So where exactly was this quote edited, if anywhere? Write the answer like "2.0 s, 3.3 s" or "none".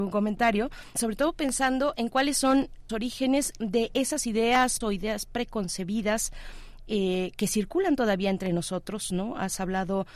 0.9 s, 2.9 s, 4.8 s